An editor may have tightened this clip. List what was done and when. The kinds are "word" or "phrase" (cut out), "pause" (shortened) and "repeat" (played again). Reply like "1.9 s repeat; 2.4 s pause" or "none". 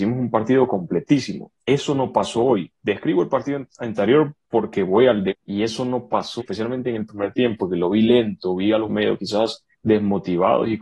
1.6 s pause; 5.3 s word; 6.4 s word; 8.9 s phrase; 9.7 s pause